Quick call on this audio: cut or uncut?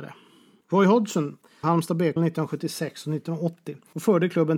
cut